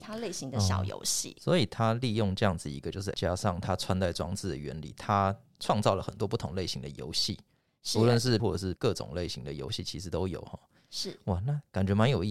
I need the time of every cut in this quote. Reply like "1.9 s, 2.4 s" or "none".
3.1 s, 8.4 s, 8.8 s